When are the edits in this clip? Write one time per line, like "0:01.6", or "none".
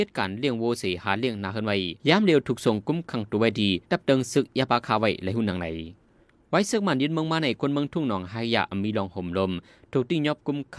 0:02.0
0:03.8